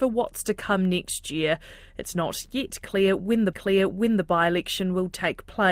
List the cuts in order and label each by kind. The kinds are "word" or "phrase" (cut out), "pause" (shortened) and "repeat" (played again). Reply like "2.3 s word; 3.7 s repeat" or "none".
3.5 s repeat